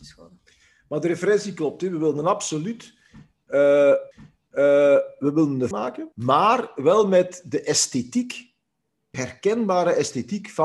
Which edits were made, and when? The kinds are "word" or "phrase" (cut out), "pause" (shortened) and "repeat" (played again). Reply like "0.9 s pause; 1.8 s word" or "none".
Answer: 4.1 s repeat; 5.7 s phrase; 6.1 s pause; 9.1 s word